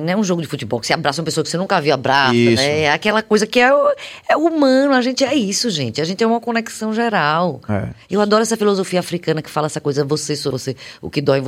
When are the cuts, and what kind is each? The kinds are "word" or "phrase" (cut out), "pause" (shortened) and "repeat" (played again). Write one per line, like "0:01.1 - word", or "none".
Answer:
0:10.5 - word